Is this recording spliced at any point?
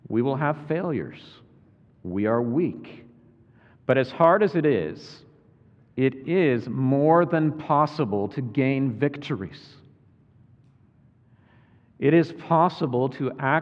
no; 0 cuts

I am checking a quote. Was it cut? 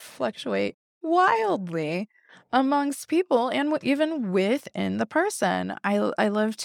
no; 0 cuts

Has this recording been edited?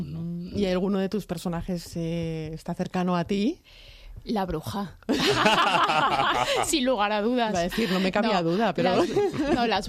no; 0 cuts

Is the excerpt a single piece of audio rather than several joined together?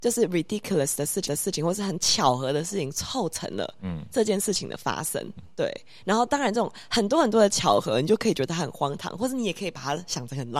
no; 2 cuts; at 1.3 s, 5.4 s

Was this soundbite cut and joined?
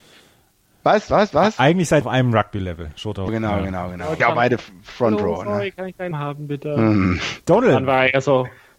yes; 4 cuts; at 2.0 s, 3.3 s, 4.2 s, 6.1 s

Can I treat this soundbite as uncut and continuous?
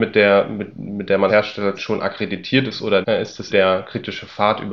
no; 4 cuts; at 1.3 s, 1.7 s, 3.0 s, 3.5 s

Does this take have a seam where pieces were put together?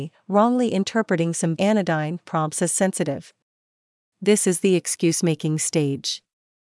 yes; 1 cut; at 1.6 s

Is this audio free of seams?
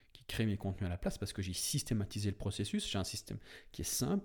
yes; 0 cuts

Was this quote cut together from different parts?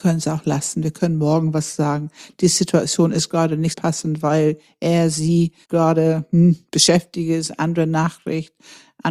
yes; 2 cuts; at 3.7 s, 5.6 s

